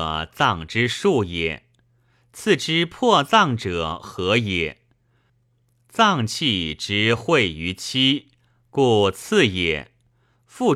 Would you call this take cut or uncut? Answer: uncut